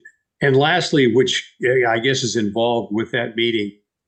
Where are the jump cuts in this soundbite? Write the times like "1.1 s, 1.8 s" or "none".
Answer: none